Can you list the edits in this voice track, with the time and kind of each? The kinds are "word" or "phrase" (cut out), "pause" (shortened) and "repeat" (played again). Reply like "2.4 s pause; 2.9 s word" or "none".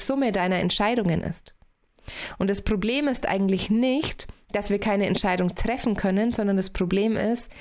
none